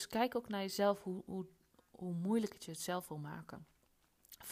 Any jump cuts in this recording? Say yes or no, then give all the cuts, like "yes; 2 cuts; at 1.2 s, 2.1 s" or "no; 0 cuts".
no; 0 cuts